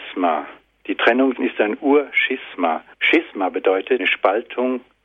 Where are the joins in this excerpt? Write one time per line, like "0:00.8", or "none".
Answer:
0:01.4
0:02.9
0:04.0